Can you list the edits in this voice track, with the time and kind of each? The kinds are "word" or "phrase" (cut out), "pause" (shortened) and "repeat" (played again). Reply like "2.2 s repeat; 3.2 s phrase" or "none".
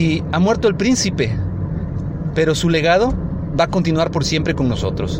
none